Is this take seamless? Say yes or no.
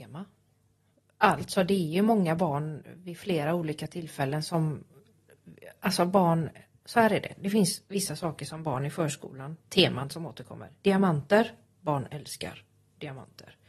yes